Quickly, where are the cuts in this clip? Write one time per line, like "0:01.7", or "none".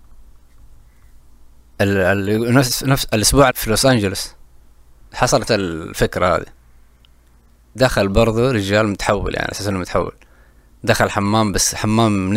0:03.5
0:05.5
0:07.8